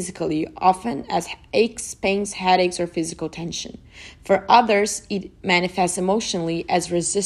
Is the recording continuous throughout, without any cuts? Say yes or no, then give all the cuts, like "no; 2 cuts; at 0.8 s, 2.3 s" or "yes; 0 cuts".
yes; 0 cuts